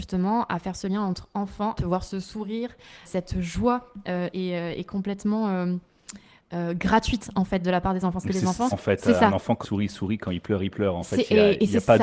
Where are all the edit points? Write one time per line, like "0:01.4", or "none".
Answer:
0:01.8
0:03.0
0:04.3
0:08.2
0:08.7
0:09.6